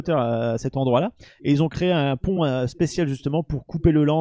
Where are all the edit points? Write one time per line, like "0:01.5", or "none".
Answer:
none